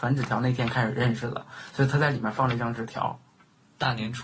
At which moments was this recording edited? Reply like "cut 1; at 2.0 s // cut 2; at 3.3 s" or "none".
none